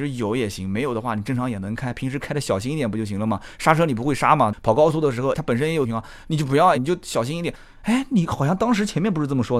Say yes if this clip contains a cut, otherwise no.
yes